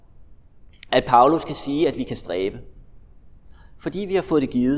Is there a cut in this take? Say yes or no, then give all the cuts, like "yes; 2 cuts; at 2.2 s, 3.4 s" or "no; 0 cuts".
no; 0 cuts